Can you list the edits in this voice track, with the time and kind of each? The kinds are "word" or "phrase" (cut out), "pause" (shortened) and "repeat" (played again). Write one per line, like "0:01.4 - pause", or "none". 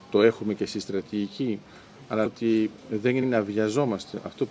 0:02.3 - word
0:03.2 - word